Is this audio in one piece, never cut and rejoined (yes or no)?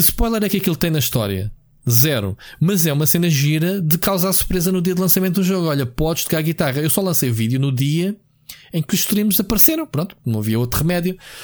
yes